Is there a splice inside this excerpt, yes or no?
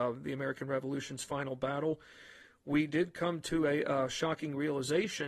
no